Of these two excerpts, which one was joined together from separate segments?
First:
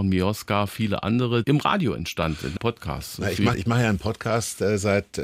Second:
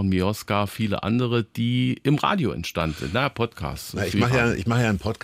first; 3 cuts; at 1.4 s, 2.6 s, 3.5 s

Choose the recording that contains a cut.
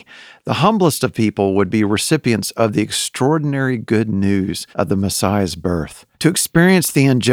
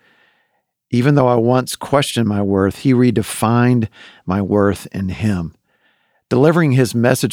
first; 2 cuts; at 4.7 s, 6.1 s

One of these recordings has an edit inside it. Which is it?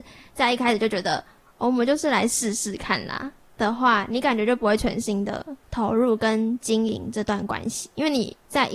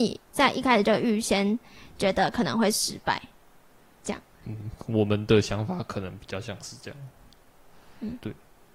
first; 1 cut; at 5.6 s

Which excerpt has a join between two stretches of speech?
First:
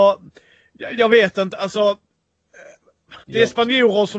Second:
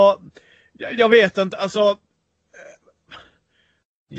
first; 1 cut; at 3.2 s

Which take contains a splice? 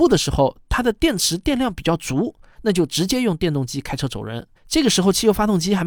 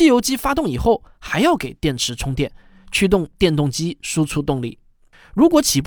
first; 1 cut; at 4.6 s

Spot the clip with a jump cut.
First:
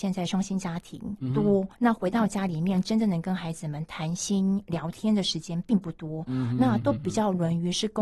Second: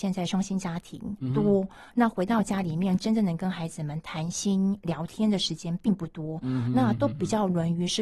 first; 1 cut; at 1.7 s

